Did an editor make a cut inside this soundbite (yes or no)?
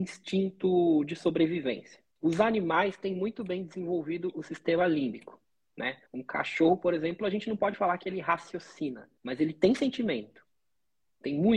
yes